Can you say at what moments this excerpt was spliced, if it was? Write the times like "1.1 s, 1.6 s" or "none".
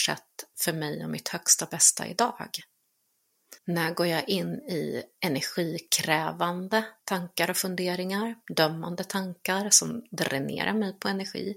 3.6 s, 7.0 s